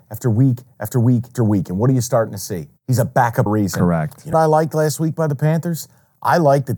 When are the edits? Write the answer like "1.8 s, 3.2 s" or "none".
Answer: 1.3 s, 2.8 s, 3.5 s, 4.3 s